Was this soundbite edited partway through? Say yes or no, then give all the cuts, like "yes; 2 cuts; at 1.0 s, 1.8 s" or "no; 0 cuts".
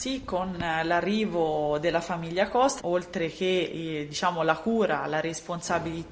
yes; 1 cut; at 2.8 s